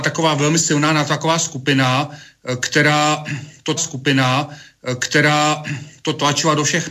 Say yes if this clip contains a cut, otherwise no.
yes